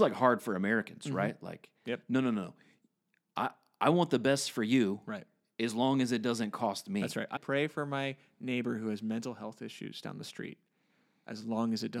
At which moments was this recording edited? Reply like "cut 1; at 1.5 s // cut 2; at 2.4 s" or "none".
cut 1; at 7.4 s